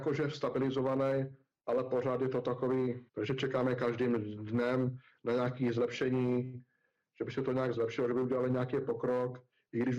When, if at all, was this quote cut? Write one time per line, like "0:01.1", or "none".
0:03.1